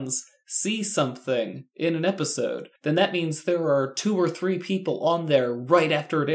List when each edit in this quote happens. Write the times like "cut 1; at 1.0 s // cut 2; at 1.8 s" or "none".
cut 1; at 2.8 s